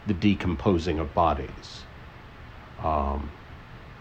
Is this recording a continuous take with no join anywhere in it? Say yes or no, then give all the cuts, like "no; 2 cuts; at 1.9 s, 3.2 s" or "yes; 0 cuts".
yes; 0 cuts